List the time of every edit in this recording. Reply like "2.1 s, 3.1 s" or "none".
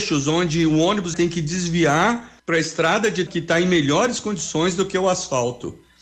1.1 s, 2.4 s, 3.3 s